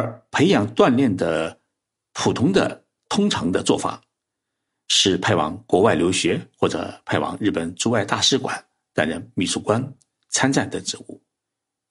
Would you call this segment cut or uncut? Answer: uncut